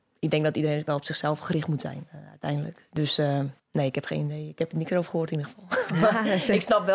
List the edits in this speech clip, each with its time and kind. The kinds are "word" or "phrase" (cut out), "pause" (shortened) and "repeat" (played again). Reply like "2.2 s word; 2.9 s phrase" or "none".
3.6 s pause